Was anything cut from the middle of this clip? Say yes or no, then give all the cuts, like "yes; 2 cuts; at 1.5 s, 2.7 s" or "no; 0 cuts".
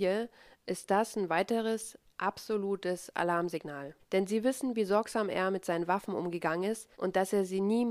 yes; 2 cuts; at 4.0 s, 6.9 s